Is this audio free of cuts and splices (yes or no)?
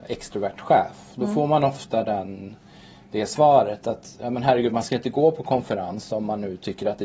yes